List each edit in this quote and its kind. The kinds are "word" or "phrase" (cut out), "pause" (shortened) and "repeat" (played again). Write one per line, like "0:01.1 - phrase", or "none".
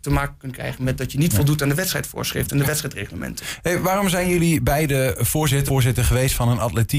0:05.7 - word